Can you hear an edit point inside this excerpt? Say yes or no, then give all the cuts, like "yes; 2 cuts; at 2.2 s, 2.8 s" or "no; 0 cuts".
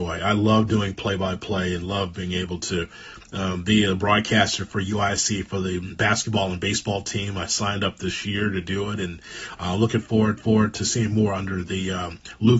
yes; 1 cut; at 10.4 s